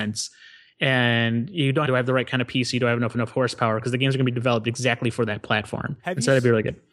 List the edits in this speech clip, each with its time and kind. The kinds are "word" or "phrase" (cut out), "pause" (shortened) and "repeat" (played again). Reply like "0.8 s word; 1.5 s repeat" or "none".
1.9 s phrase; 3.1 s repeat; 6.0 s pause